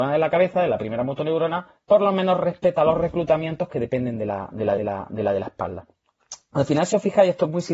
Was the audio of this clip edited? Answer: yes; 1 cut; at 4.8 s

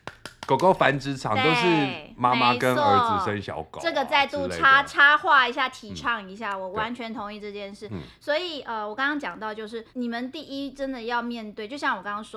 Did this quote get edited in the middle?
yes; 1 cut; at 9.9 s

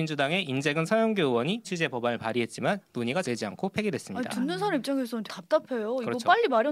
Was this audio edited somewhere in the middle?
yes; 4 cuts; at 1.6 s, 2.8 s, 3.2 s, 5.3 s

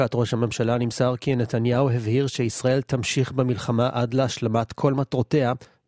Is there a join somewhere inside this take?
no; 0 cuts

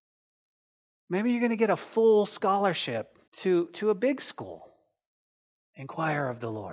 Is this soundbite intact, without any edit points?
no; 1 cut; at 3.3 s

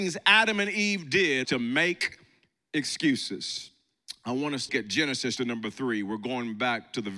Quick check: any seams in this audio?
yes; 3 cuts; at 1.4 s, 4.7 s, 5.4 s

